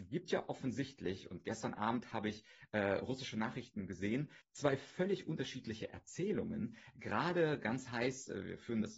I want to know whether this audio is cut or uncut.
cut